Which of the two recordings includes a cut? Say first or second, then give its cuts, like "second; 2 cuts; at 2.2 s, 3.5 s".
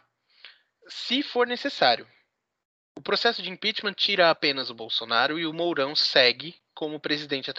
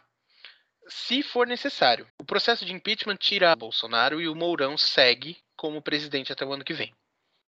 second; 2 cuts; at 2.1 s, 3.5 s